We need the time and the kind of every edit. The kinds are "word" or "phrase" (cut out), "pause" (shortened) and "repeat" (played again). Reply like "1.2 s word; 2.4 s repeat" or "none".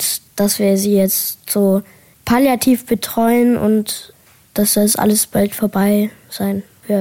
none